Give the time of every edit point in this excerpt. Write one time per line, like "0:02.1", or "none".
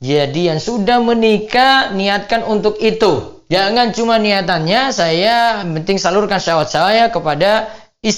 none